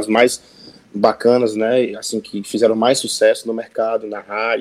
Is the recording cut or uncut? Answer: uncut